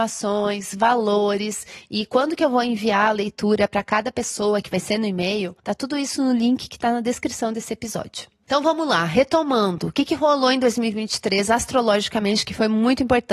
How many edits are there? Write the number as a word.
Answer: one